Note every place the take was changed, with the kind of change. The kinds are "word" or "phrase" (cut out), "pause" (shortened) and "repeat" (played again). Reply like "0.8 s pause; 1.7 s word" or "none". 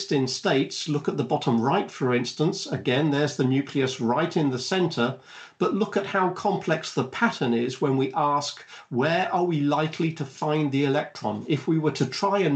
none

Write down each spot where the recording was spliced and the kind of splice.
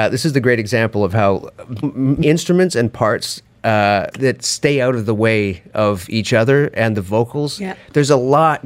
1.8 s word; 2.2 s word; 4.1 s word

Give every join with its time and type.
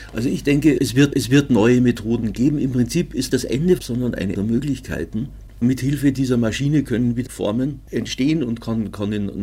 1.1 s repeat; 3.3 s phrase; 3.8 s phrase; 4.3 s word; 7.3 s word

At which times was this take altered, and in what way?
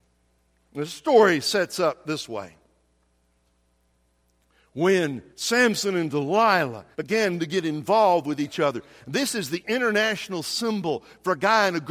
5.3 s pause; 6.9 s pause

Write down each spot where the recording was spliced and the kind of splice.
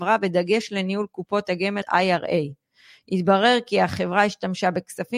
1.8 s word

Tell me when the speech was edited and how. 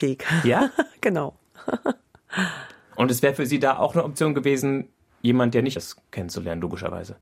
5.8 s word

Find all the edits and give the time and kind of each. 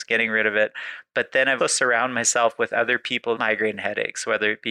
1.6 s word; 3.4 s phrase

